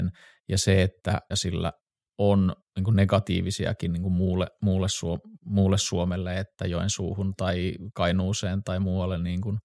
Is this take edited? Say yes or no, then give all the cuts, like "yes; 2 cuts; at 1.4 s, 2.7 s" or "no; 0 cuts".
yes; 1 cut; at 1.3 s